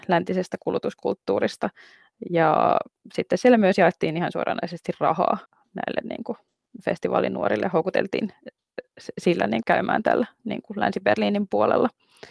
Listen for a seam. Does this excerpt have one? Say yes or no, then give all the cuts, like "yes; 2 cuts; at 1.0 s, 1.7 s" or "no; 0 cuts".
yes; 2 cuts; at 5.5 s, 9.6 s